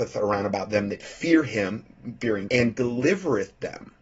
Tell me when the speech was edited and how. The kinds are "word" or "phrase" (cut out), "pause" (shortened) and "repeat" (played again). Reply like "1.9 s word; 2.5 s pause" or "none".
2.5 s word